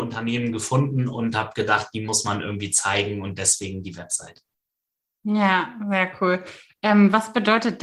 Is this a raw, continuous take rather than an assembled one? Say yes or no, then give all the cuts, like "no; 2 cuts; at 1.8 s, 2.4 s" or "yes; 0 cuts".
yes; 0 cuts